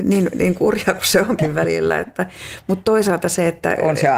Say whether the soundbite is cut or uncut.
uncut